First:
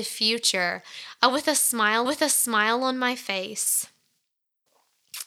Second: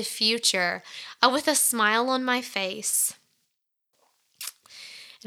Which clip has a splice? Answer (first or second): first